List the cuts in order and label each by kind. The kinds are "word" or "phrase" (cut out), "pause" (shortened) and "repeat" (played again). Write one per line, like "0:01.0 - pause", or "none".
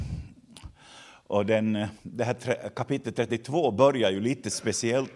0:02.0 - pause